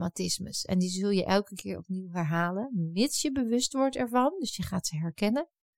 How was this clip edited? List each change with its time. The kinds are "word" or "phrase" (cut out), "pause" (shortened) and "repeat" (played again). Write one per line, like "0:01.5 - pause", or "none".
none